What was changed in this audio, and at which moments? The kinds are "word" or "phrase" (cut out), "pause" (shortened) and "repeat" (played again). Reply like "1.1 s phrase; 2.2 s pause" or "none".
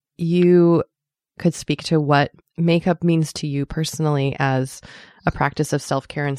none